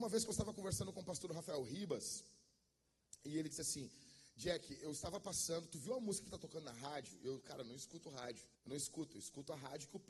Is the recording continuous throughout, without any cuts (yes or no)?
no